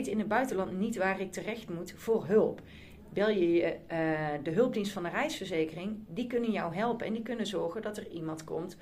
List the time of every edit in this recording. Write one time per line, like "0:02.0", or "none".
none